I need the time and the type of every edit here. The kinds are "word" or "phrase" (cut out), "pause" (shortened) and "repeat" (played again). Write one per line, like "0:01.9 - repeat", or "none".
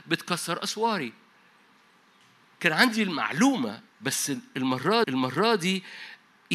0:03.9 - pause
0:05.0 - repeat